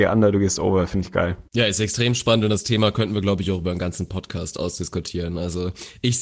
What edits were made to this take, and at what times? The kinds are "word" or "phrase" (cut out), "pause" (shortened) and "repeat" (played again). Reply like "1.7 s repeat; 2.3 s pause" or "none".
1.4 s pause